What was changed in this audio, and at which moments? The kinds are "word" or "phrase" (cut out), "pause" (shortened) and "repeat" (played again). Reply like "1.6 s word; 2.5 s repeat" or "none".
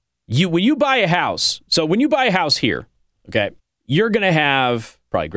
3.6 s pause